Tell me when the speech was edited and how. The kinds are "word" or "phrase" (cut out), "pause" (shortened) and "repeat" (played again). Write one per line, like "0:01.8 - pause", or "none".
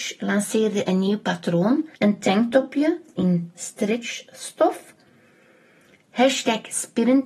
0:02.0 - pause
0:03.2 - phrase